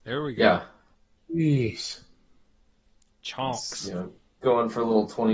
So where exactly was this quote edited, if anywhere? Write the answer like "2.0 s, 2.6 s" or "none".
none